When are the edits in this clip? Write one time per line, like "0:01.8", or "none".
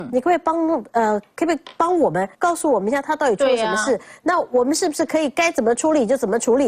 0:02.3